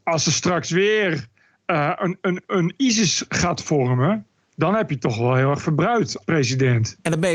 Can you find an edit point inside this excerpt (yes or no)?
yes